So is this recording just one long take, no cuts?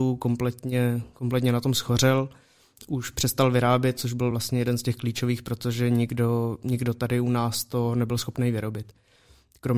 yes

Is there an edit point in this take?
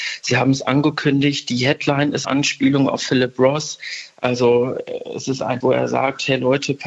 yes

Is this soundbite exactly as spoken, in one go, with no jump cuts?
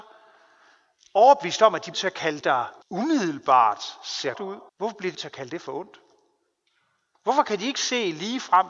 no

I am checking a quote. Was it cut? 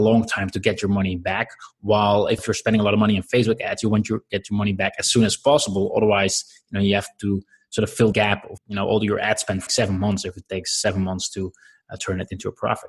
yes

